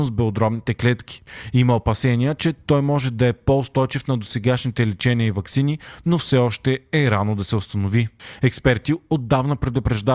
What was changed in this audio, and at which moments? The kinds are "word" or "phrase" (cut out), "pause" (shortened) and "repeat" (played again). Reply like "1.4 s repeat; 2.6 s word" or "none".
none